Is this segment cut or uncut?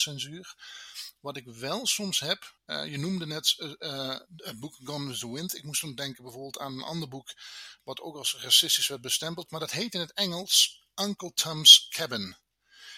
cut